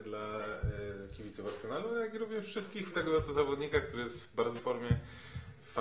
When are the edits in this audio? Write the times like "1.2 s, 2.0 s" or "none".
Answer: 2.9 s, 4.6 s